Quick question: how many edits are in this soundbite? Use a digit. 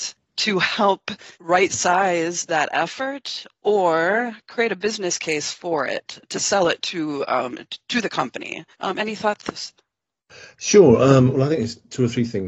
3